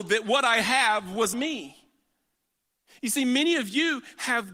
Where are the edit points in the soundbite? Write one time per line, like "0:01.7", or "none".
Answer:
0:01.3